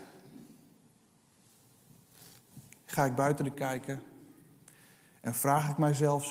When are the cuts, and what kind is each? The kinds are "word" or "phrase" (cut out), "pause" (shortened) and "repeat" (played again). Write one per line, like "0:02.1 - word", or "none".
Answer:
0:03.5 - word